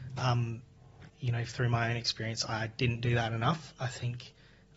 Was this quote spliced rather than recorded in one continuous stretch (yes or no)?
yes